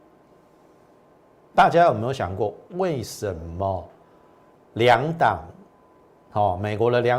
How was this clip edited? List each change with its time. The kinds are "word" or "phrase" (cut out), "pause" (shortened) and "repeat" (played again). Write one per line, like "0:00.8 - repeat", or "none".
none